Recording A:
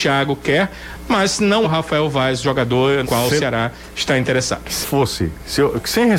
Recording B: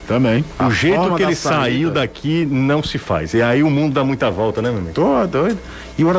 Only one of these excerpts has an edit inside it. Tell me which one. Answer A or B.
A